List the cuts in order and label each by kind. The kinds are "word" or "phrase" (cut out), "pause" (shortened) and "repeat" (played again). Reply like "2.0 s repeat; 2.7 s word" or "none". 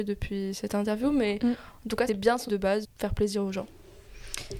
2.1 s word; 2.5 s word; 2.8 s word